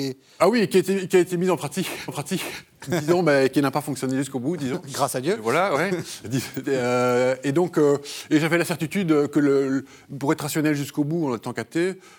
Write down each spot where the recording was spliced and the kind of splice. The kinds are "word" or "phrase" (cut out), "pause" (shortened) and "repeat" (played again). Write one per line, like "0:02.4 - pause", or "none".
0:02.1 - repeat